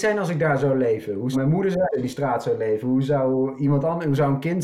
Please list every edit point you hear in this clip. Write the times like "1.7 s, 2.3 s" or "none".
1.3 s, 1.9 s